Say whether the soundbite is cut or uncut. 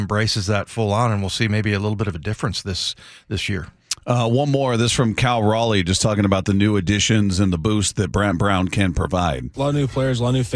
uncut